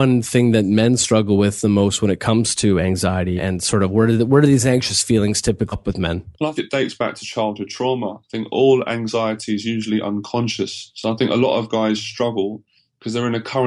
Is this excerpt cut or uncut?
cut